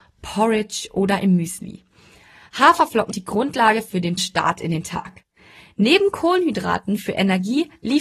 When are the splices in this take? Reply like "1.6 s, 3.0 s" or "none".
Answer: 3.1 s, 4.2 s